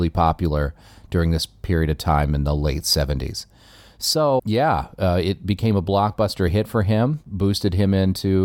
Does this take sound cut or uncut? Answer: cut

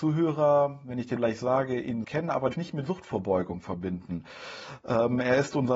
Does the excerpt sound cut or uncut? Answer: cut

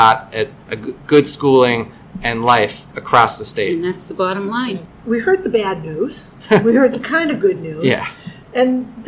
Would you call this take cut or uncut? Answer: cut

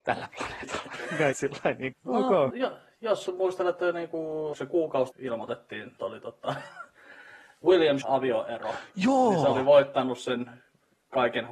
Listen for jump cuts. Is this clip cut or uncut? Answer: cut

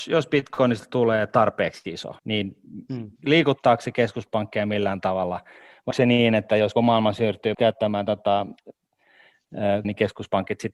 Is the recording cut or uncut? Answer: cut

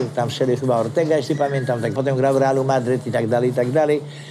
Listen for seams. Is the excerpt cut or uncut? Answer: cut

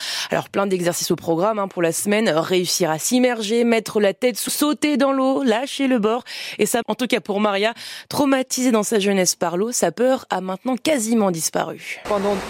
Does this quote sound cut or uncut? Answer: cut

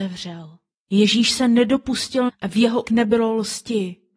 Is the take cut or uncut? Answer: cut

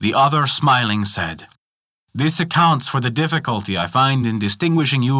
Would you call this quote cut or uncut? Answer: uncut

